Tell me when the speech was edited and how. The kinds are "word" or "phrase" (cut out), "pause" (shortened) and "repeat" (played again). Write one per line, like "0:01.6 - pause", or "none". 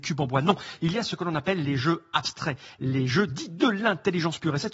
none

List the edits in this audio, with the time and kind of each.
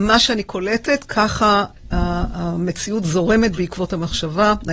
none

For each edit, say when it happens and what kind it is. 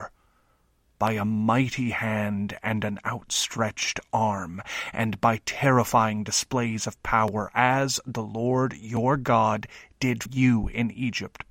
0:10.3 - word

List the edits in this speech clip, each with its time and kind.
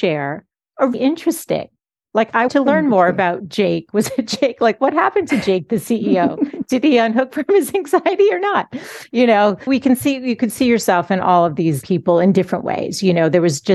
0:00.9 - word
0:02.5 - word
0:09.7 - word
0:11.8 - word

